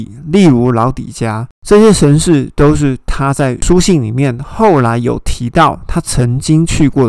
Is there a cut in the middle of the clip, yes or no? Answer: yes